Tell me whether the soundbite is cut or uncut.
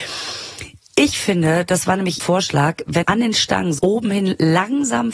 cut